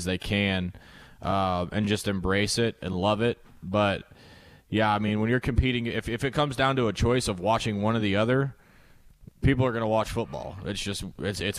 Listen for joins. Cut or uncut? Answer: uncut